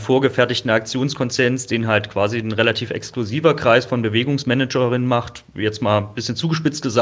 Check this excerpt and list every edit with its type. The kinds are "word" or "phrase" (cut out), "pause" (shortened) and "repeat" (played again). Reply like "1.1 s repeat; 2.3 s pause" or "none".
none